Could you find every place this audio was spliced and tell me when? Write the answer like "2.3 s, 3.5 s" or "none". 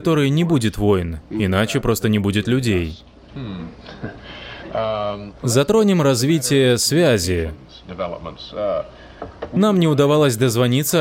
5.4 s